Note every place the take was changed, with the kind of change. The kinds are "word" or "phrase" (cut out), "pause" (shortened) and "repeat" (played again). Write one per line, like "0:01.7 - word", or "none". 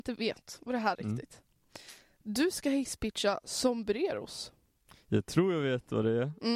0:00.9 - word
0:04.8 - pause